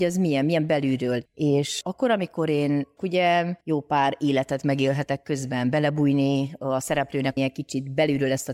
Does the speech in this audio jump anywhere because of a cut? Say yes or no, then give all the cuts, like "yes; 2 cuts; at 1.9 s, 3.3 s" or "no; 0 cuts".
yes; 4 cuts; at 1.8 s, 3.0 s, 3.6 s, 7.4 s